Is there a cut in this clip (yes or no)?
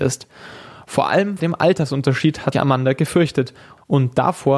yes